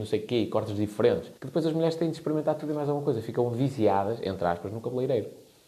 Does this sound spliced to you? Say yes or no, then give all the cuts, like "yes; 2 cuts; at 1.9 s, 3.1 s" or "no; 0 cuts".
yes; 1 cut; at 1.4 s